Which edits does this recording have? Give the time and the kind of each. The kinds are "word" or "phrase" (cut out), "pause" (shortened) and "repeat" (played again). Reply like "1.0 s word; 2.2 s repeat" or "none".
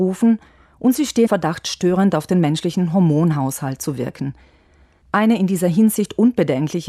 1.3 s word

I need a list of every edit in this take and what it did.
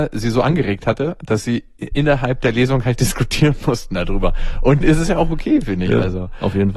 4.8 s word

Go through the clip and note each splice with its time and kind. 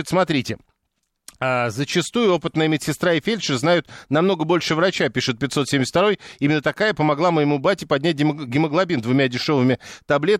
none

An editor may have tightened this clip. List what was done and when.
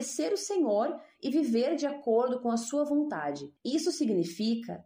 3.6 s pause

